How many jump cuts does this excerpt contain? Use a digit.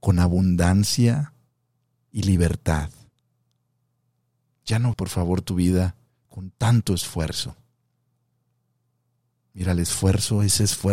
1